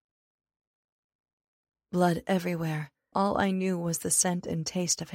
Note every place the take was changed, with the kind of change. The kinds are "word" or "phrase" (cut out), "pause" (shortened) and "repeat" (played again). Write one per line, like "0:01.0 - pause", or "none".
0:03.1 - word